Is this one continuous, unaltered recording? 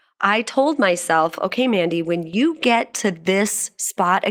yes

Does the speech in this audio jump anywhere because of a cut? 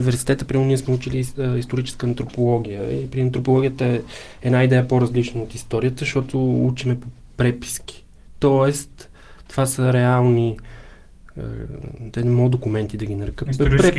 no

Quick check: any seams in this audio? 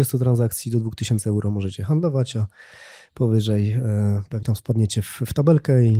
yes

